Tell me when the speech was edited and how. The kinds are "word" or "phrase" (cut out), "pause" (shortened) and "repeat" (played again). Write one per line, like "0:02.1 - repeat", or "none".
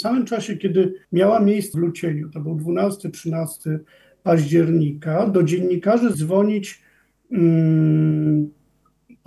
0:01.0 - pause
0:01.7 - phrase
0:06.1 - word